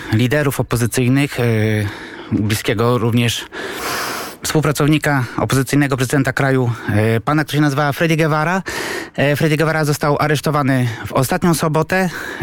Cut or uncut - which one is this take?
uncut